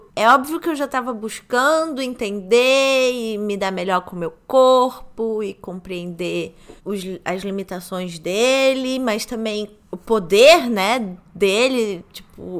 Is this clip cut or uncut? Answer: cut